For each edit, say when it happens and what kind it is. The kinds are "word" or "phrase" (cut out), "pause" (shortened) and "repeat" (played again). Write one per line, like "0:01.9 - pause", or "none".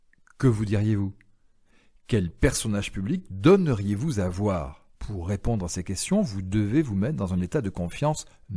0:04.9 - pause